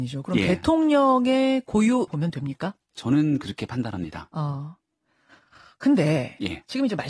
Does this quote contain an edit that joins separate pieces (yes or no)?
yes